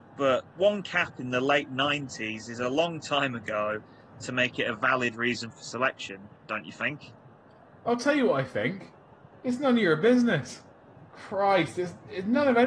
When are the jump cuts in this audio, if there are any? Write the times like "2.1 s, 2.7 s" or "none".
11.1 s